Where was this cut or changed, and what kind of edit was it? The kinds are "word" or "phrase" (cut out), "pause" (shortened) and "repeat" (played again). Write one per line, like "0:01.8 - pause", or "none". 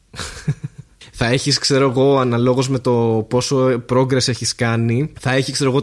none